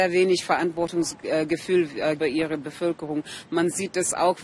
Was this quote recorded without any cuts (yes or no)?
no